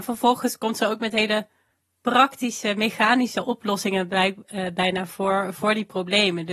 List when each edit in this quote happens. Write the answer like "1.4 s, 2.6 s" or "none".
none